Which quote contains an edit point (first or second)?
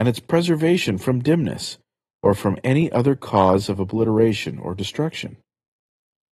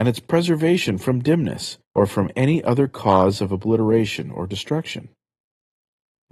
second